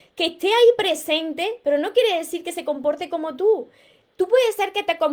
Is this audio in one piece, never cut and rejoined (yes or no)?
yes